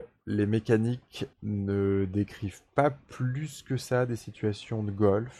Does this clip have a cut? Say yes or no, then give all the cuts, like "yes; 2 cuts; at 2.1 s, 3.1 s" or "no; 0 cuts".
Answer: yes; 1 cut; at 1.3 s